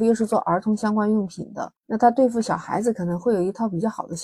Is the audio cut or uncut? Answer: cut